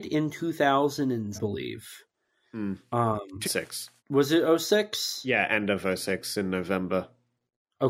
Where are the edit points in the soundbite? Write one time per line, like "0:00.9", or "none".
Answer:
0:01.3
0:03.4
0:04.0